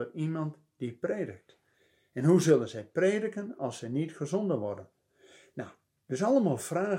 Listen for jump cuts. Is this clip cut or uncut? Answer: uncut